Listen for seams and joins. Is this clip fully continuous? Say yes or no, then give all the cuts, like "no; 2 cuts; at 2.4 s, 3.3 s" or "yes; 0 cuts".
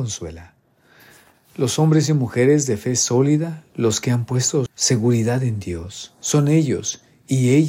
no; 1 cut; at 4.7 s